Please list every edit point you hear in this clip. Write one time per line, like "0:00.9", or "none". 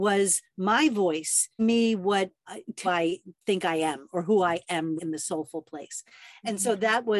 0:01.6
0:02.8
0:05.0